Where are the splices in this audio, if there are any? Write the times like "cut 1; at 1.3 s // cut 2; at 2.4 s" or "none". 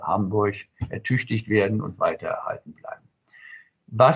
none